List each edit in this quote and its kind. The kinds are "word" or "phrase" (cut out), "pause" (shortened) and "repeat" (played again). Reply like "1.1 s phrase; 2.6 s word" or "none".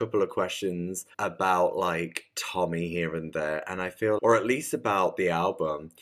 1.1 s pause; 4.2 s word